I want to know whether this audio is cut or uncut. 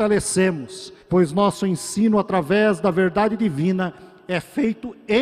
cut